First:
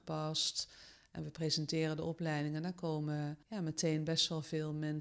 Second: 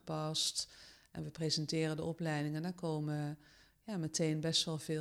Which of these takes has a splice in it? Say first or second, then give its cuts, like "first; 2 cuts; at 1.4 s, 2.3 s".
first; 1 cut; at 3.4 s